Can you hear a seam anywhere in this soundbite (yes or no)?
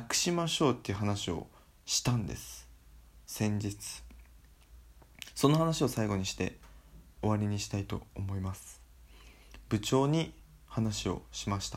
no